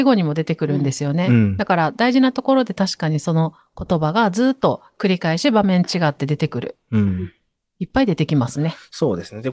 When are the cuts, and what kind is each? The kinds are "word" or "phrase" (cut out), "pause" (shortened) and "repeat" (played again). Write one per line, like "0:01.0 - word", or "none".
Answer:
none

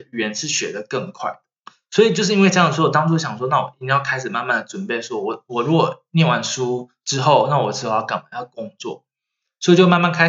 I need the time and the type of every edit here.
0:01.6 - pause

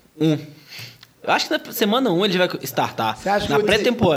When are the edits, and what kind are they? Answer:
none

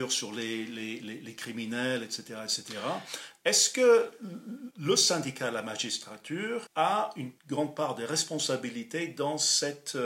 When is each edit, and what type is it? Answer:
0:04.7 - pause
0:06.7 - pause
0:07.4 - pause

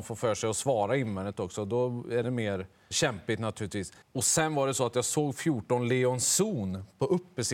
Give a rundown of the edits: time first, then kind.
0:02.2 - word
0:02.9 - word
0:04.0 - pause

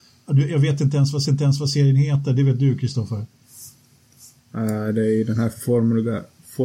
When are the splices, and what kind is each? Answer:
0:01.2 - repeat

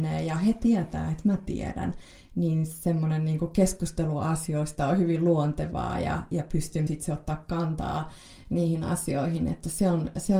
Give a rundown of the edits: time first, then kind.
0:06.9 - word

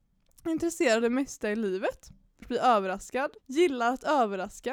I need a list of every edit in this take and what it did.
0:01.0 - word
0:02.4 - word
0:03.4 - pause

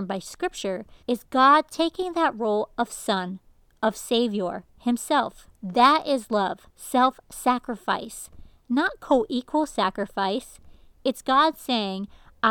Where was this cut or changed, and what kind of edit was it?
0:01.0 - pause
0:05.5 - pause
0:06.7 - pause

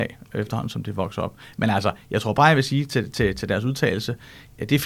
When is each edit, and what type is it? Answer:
none

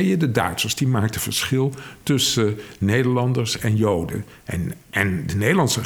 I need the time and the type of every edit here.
none

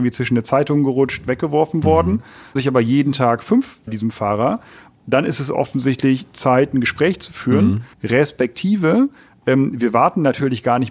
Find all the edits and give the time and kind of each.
0:02.6 - word
0:03.9 - phrase
0:07.9 - pause

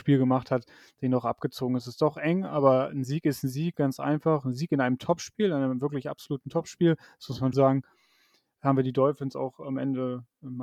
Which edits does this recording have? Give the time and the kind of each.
0:07.5 - word

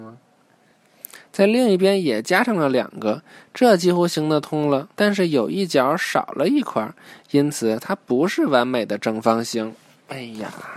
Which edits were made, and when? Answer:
0:04.9 - pause

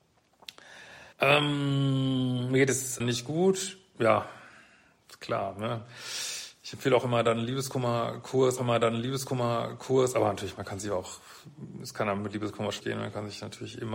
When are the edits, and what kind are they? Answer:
0:01.1 - pause
0:03.0 - word
0:08.6 - repeat
0:12.8 - phrase

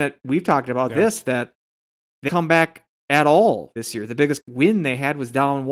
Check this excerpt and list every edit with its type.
0:02.3 - word
0:03.8 - word
0:04.4 - word

